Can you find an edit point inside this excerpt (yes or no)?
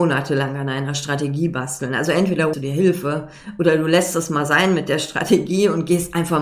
yes